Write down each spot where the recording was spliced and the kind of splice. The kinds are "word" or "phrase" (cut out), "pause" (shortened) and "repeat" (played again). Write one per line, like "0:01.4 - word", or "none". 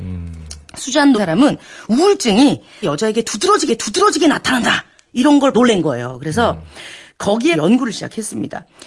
0:01.1 - phrase
0:02.8 - word
0:03.7 - repeat
0:05.5 - word
0:07.5 - word